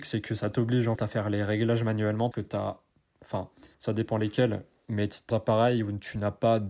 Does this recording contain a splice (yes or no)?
yes